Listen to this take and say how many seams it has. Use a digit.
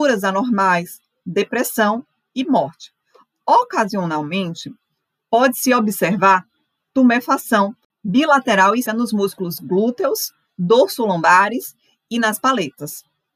1